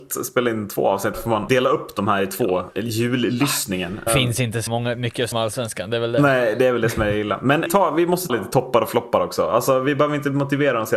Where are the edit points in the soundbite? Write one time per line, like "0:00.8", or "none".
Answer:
0:01.1
0:01.5
0:04.1
0:04.7
0:05.3
0:07.7
0:08.3